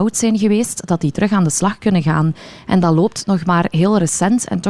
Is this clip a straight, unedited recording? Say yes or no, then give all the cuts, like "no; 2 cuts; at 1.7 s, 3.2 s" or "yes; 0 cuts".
yes; 0 cuts